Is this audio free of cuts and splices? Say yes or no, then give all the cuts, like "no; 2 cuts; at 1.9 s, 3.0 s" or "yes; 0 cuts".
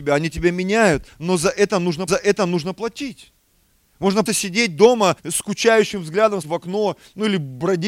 no; 4 cuts; at 2.1 s, 4.3 s, 5.2 s, 6.4 s